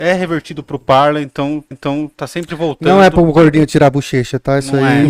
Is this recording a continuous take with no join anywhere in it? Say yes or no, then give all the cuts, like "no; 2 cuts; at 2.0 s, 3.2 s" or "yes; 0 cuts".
no; 1 cut; at 1.7 s